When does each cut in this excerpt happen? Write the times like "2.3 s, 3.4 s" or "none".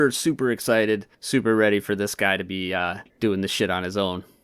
1.1 s, 3.1 s